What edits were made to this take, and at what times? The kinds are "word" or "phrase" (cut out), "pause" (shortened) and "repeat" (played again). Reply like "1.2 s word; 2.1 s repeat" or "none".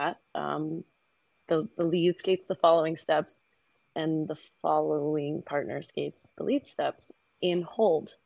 none